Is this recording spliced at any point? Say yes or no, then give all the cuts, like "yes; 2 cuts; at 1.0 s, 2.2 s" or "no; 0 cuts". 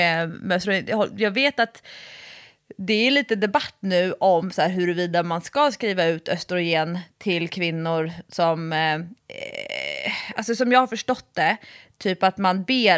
yes; 1 cut; at 9.2 s